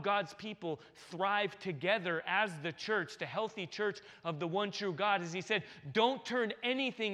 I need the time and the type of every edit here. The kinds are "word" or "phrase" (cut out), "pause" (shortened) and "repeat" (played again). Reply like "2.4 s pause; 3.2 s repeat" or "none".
none